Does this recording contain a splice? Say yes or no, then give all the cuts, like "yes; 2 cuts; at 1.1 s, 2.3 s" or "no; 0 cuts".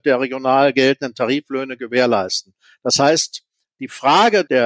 no; 0 cuts